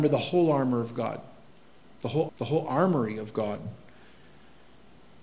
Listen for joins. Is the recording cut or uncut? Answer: cut